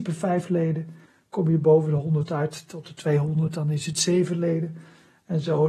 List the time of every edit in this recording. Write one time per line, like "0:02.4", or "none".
0:01.1